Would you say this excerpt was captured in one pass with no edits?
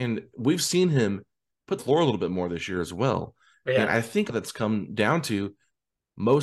no; 2 cuts; at 1.8 s, 4.3 s

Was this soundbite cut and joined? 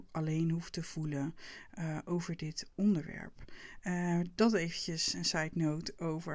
no; 0 cuts

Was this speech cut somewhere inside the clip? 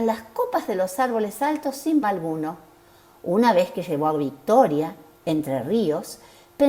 yes; 1 cut; at 2.0 s

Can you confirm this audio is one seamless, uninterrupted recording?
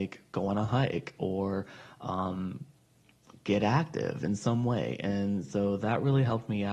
yes; 0 cuts

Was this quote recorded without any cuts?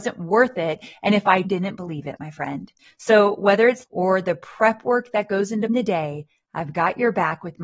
no; 4 cuts; at 1.4 s, 2.8 s, 3.8 s, 5.7 s

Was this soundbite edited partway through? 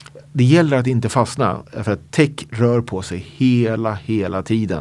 no; 0 cuts

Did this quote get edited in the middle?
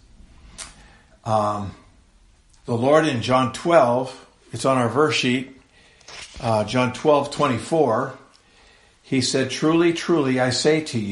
no; 0 cuts

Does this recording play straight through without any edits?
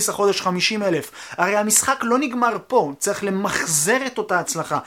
yes; 0 cuts

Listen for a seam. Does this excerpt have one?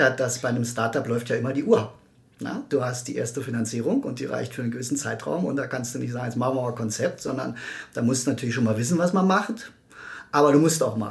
no; 0 cuts

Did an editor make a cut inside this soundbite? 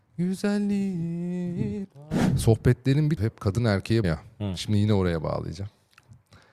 yes; 3 cuts; at 1.8 s, 3.2 s, 4.0 s

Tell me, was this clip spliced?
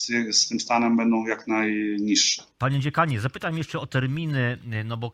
yes; 1 cut; at 2.5 s

